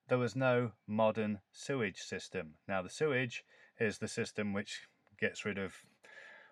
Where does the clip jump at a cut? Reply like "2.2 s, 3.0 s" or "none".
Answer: none